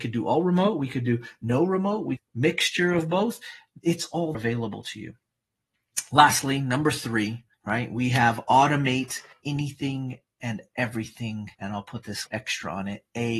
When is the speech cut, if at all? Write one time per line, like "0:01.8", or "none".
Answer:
0:02.2
0:04.3
0:07.5
0:09.3
0:11.5
0:12.3